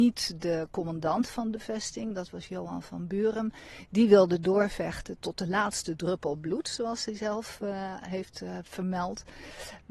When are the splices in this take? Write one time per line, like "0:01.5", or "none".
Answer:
none